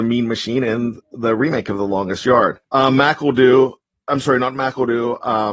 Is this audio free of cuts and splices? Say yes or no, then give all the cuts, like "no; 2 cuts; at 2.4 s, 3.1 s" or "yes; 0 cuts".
no; 2 cuts; at 2.6 s, 3.8 s